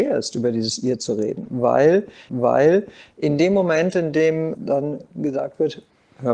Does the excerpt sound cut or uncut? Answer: cut